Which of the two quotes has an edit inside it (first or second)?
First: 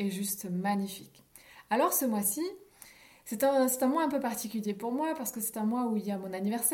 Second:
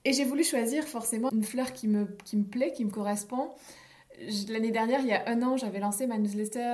second